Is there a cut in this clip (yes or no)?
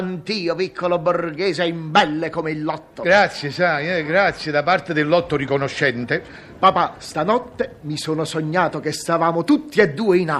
no